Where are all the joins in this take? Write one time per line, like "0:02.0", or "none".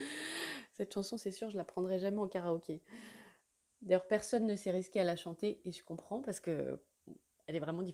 none